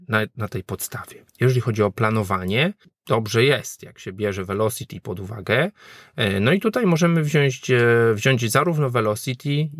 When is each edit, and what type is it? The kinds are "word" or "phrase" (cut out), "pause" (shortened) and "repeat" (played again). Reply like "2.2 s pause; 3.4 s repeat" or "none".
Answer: 1.3 s pause